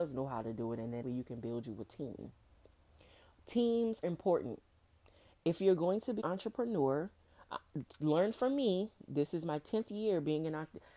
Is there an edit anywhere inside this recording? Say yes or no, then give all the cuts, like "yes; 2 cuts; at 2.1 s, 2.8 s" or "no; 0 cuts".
yes; 3 cuts; at 1.0 s, 4.0 s, 6.2 s